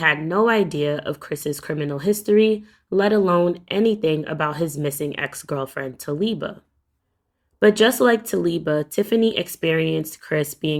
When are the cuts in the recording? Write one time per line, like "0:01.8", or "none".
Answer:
none